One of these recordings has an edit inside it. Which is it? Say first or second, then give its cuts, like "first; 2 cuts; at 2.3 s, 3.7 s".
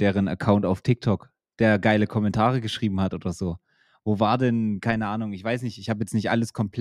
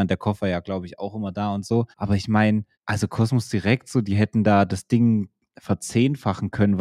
second; 2 cuts; at 1.9 s, 2.7 s